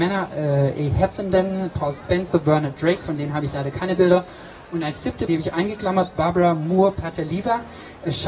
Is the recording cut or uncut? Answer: cut